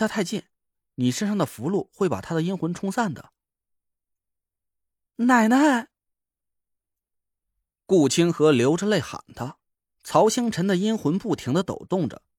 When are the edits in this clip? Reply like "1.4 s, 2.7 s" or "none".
none